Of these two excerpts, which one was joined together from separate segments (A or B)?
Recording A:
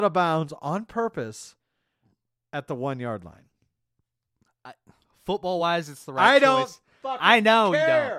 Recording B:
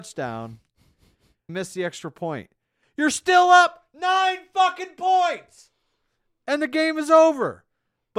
B